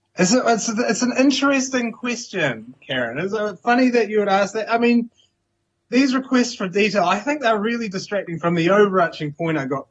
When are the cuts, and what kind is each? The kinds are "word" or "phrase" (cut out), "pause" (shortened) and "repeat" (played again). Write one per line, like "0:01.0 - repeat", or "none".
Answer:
none